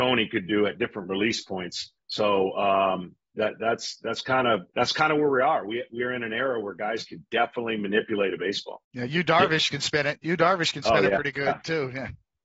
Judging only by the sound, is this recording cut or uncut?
cut